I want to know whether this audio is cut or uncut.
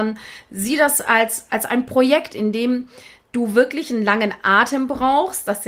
uncut